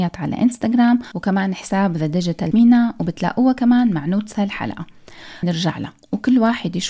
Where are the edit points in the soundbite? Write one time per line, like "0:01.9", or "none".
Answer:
0:02.5
0:05.4